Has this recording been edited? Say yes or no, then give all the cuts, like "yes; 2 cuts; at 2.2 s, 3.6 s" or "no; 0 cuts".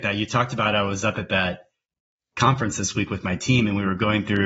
no; 0 cuts